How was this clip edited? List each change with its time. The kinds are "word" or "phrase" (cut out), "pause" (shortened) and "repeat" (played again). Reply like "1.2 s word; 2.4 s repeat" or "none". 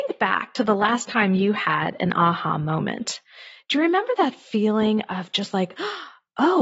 none